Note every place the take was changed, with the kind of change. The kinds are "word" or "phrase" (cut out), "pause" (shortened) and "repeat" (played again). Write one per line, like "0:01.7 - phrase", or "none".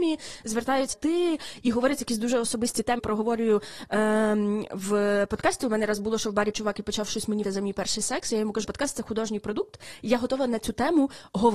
0:00.9 - word
0:03.0 - word
0:06.5 - word
0:07.4 - word
0:08.6 - word

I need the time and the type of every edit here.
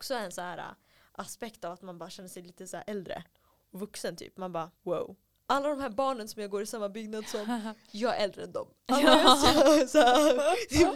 0:04.7 - pause

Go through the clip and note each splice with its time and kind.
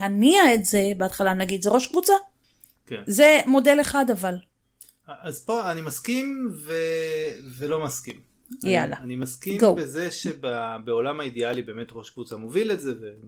none

